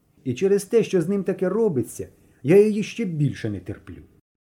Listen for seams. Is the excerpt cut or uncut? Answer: uncut